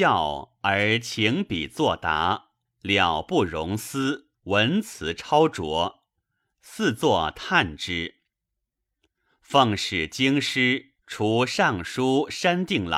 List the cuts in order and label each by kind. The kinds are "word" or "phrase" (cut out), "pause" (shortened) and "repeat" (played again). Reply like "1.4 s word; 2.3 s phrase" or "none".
2.6 s pause; 4.3 s pause; 11.0 s pause